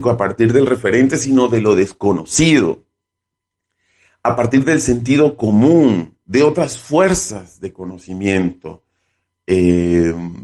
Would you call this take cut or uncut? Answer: uncut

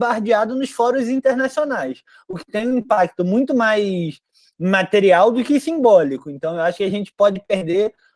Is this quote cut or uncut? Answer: uncut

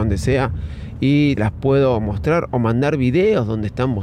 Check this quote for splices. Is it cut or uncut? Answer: cut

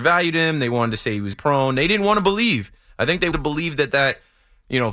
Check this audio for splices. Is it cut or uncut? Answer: cut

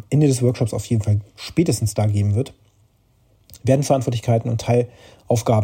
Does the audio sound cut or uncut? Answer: uncut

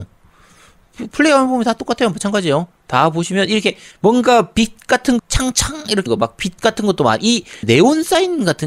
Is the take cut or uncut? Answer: cut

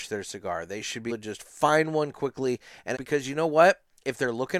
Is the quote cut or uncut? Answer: cut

